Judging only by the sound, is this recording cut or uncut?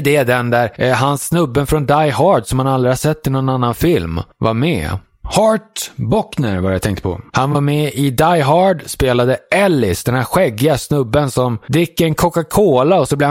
uncut